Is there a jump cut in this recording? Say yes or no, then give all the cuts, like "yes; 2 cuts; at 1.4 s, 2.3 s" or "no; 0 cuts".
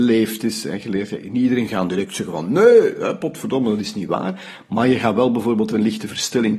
no; 0 cuts